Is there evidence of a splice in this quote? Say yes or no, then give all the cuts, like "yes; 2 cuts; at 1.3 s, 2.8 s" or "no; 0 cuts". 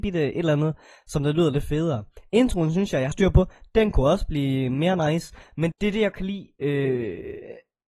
yes; 3 cuts; at 3.1 s, 5.7 s, 6.1 s